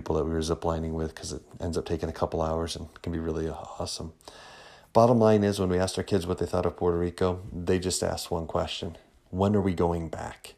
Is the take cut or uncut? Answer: uncut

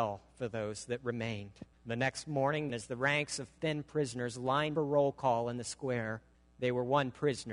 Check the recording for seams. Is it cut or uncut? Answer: cut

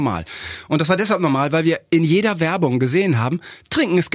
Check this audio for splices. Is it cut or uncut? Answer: uncut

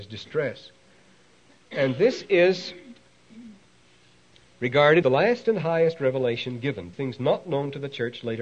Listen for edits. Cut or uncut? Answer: cut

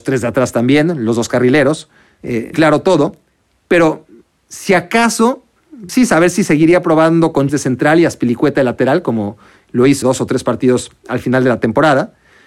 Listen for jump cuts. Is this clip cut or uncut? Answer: cut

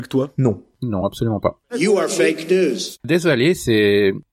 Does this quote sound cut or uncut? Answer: uncut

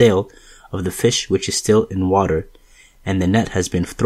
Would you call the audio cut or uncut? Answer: uncut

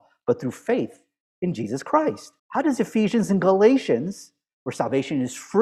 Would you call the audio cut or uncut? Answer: cut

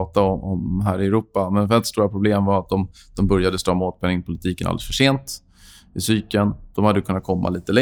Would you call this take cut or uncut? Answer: uncut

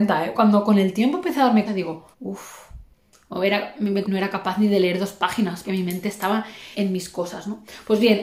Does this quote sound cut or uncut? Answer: cut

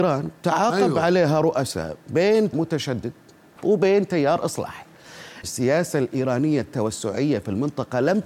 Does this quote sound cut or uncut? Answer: cut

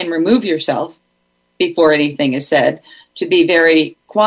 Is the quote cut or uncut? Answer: uncut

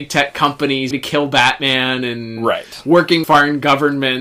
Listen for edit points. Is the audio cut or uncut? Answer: cut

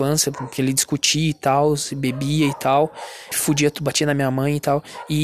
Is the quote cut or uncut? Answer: cut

